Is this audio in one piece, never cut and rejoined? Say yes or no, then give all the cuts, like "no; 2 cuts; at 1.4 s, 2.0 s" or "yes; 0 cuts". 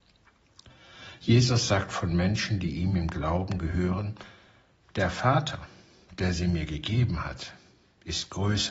yes; 0 cuts